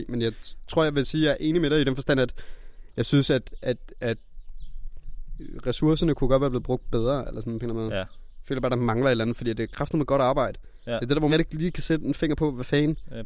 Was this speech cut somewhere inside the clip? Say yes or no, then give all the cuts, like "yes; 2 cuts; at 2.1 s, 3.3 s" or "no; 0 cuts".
yes; 1 cut; at 11.3 s